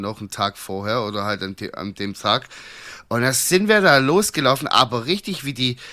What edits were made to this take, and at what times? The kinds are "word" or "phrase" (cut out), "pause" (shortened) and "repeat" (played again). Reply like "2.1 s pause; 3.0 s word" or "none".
none

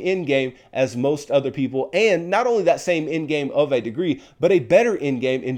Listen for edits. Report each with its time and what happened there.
none

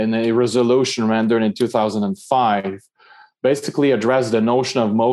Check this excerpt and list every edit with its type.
none

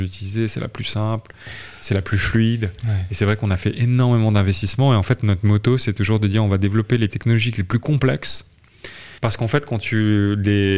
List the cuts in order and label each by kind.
7.1 s word; 9.2 s pause

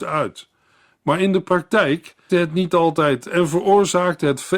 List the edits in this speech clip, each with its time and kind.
2.3 s word

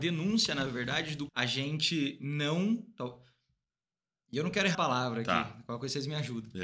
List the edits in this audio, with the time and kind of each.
1.3 s word; 4.7 s word

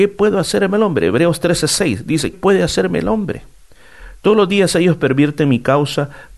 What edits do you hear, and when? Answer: 2.3 s word

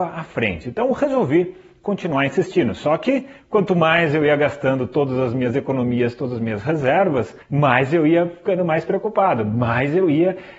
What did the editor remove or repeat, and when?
7.4 s pause

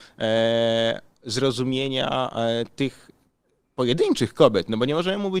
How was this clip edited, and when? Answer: 3.4 s pause

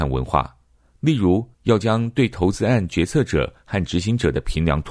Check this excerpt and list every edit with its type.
1.5 s pause

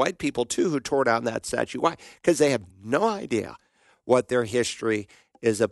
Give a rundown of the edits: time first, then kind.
none

